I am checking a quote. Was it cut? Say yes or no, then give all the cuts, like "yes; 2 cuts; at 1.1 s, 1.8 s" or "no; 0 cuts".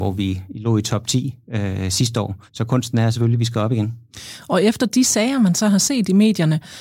yes; 1 cut; at 2.5 s